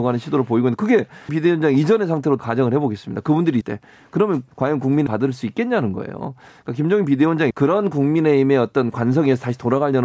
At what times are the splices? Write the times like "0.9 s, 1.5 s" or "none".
1.3 s, 2.4 s, 3.6 s, 4.5 s, 5.1 s, 7.5 s